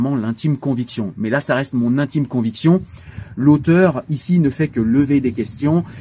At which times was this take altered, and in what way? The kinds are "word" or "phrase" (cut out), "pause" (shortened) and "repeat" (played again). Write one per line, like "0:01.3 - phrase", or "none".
none